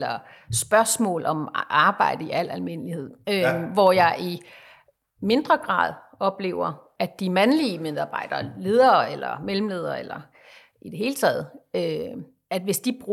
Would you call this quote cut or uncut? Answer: uncut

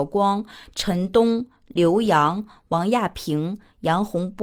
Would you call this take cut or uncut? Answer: uncut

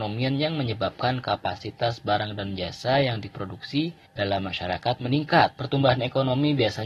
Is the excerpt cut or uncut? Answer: cut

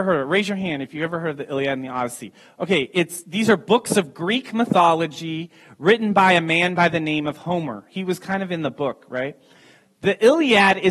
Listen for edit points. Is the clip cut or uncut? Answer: uncut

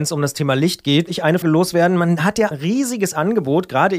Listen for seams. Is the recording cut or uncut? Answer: cut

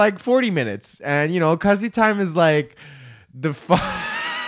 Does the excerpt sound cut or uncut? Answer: uncut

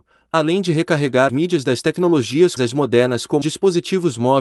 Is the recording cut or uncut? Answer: cut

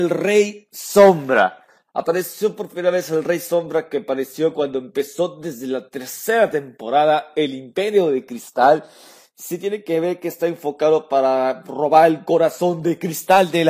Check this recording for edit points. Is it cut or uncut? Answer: uncut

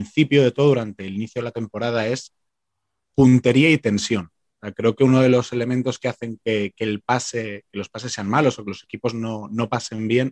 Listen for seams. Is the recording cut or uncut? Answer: uncut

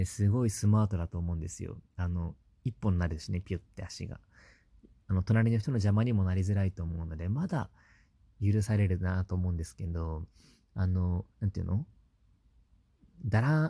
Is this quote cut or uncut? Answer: cut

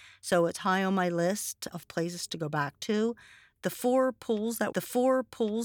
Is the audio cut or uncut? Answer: cut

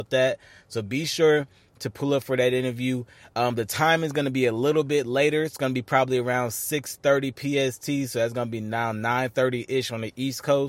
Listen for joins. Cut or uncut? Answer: uncut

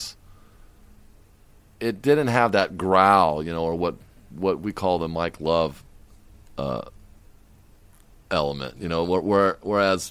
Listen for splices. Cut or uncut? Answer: uncut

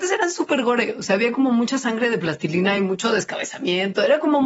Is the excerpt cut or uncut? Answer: uncut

